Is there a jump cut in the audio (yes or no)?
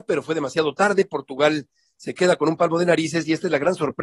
no